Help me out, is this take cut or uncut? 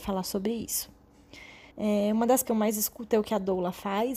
cut